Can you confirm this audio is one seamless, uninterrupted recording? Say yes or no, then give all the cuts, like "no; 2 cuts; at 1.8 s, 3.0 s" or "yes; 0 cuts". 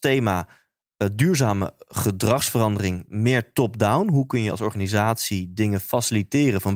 yes; 0 cuts